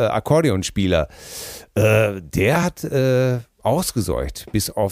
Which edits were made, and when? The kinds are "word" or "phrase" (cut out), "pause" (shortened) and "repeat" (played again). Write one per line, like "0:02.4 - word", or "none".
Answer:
none